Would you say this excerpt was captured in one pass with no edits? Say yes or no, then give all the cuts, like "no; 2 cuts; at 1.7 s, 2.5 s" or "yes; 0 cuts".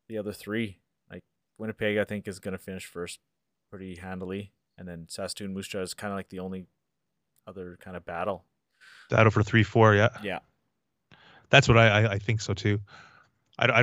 yes; 0 cuts